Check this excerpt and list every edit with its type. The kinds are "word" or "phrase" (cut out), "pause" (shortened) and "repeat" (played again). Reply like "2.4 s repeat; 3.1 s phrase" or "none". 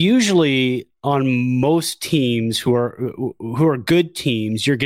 none